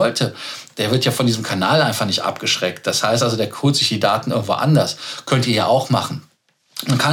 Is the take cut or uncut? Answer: uncut